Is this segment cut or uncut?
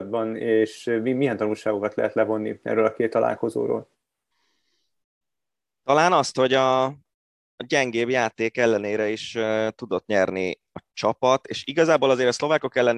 uncut